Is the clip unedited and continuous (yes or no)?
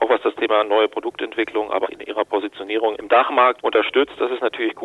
no